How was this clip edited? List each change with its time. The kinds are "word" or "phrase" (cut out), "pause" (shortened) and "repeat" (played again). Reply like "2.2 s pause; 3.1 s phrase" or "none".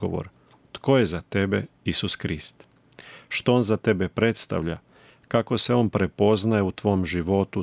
none